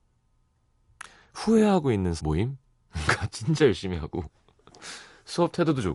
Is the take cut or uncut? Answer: cut